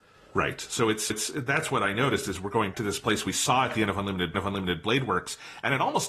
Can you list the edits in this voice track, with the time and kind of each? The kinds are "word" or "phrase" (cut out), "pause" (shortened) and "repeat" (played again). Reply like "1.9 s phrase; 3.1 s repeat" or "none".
1.1 s repeat; 2.7 s word; 4.3 s repeat